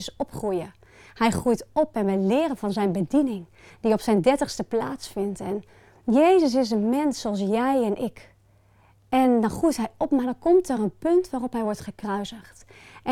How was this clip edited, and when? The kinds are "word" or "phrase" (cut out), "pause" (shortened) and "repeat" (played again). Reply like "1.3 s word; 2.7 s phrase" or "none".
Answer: none